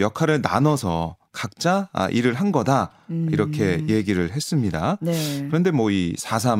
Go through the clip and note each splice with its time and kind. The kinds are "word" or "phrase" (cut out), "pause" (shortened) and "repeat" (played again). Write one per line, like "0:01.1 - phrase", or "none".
none

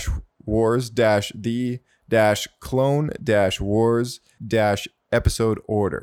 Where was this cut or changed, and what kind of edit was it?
0:04.4 - phrase

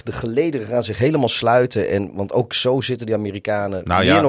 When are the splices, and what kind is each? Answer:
none

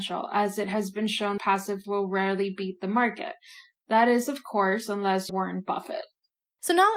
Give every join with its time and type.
0:01.4 - word
0:01.8 - word
0:05.3 - word

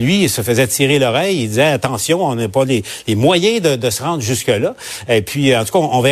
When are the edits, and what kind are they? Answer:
none

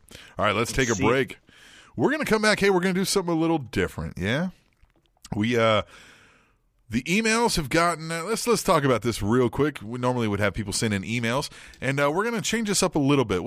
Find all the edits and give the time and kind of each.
none

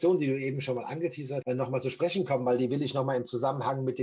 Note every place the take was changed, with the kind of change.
0:01.4 - word

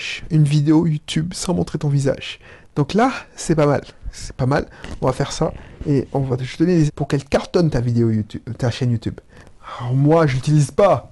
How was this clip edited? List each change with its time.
0:06.9 - word

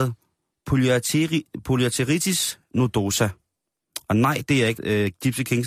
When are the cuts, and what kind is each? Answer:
0:04.8 - word

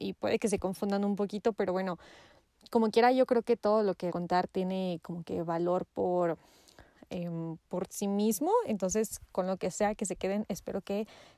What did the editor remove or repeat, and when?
0:04.1 - phrase
0:07.6 - word

